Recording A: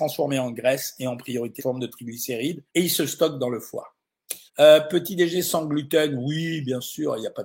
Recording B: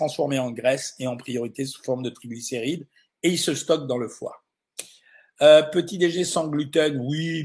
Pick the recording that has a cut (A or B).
A